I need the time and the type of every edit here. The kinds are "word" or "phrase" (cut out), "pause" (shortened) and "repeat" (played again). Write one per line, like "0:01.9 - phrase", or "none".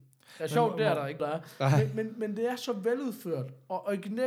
0:01.2 - word